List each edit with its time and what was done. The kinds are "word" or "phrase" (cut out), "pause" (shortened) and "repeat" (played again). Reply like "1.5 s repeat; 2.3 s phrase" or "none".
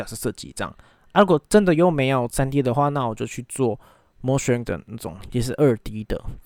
4.6 s word